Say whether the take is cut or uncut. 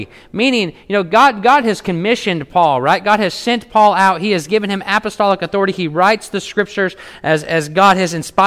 uncut